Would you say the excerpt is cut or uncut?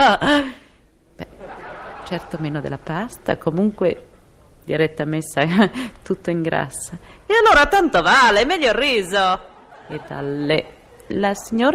uncut